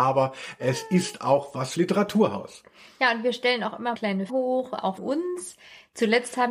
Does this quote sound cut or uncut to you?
cut